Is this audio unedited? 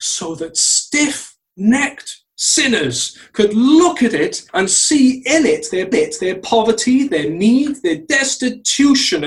no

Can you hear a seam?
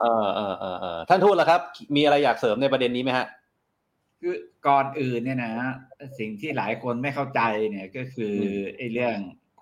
no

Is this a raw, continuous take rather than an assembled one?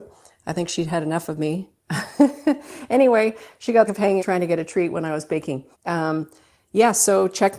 no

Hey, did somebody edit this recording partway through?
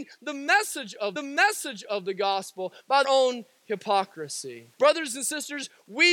yes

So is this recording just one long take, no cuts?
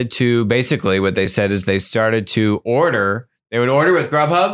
yes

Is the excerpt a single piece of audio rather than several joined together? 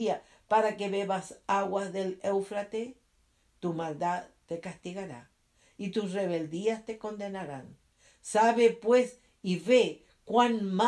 yes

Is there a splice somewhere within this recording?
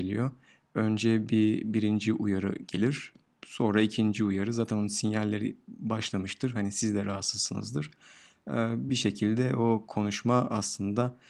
no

